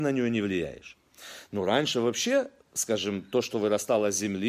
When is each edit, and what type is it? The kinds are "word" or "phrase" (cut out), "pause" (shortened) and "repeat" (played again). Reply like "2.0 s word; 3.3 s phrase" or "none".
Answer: none